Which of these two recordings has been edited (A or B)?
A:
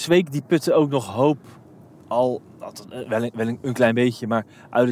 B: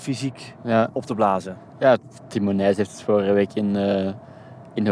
A